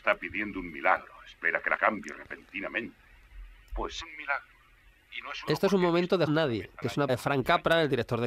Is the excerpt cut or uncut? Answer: cut